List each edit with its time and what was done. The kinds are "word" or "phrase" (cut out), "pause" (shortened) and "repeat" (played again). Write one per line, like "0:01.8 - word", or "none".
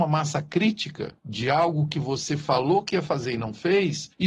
0:01.2 - pause

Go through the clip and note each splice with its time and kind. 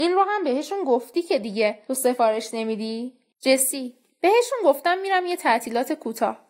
none

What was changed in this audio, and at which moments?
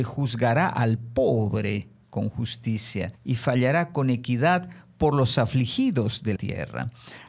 0:03.1 - pause
0:06.4 - word

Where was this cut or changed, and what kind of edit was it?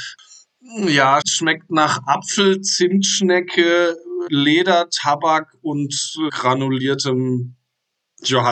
0:01.2 - word
0:04.3 - word
0:06.3 - word

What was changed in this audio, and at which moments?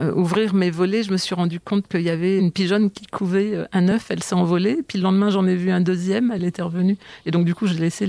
none

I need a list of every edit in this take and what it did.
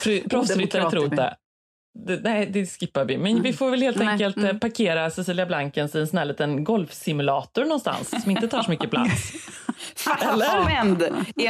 0:01.0 - word

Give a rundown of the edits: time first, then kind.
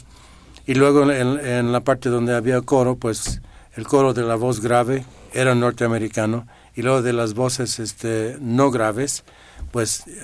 none

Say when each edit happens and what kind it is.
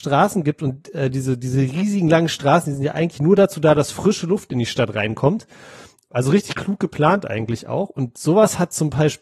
none

